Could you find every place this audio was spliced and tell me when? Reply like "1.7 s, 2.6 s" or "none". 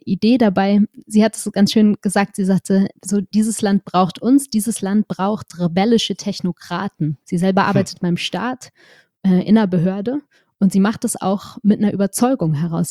7.2 s

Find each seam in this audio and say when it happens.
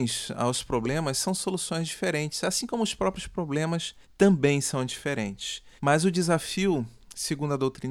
4.0 s, 5.8 s

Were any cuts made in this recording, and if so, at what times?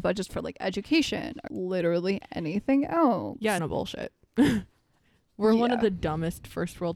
1.5 s, 3.6 s

